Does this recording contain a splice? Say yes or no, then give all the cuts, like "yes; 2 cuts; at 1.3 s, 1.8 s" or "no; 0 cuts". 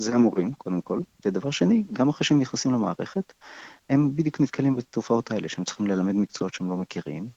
no; 0 cuts